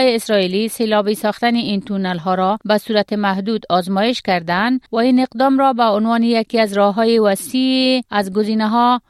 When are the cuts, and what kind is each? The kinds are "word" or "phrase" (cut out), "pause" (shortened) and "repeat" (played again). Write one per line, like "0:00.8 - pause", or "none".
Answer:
0:02.6 - pause
0:04.9 - pause
0:08.1 - pause